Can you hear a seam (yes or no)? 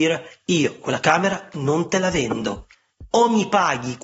no